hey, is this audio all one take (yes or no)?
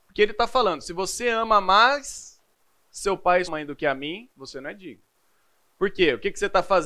no